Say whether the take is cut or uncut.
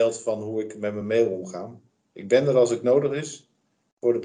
uncut